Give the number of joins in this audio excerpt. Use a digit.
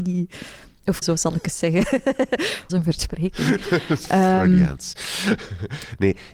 2